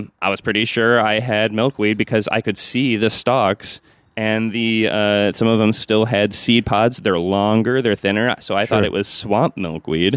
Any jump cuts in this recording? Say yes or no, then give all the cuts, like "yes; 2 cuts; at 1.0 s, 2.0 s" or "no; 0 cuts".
no; 0 cuts